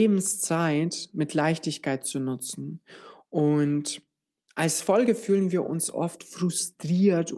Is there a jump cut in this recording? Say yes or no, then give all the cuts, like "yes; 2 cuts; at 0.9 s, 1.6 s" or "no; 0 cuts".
no; 0 cuts